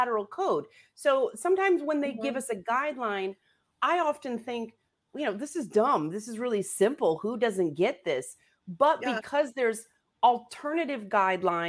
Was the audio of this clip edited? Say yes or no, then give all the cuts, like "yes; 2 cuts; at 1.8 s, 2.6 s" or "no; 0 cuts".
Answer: no; 0 cuts